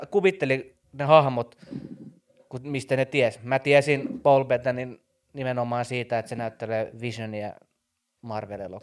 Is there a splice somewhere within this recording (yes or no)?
no